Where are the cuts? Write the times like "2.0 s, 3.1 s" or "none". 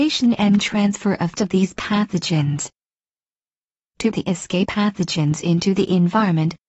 1.4 s, 4.1 s, 4.7 s